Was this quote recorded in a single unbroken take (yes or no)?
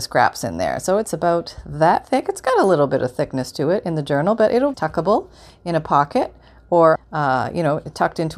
no